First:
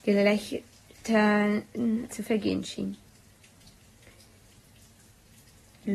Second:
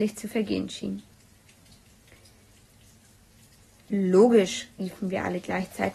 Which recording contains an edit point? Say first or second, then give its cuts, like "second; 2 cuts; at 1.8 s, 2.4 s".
first; 1 cut; at 2.1 s